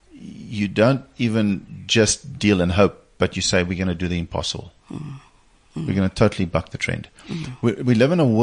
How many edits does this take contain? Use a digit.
0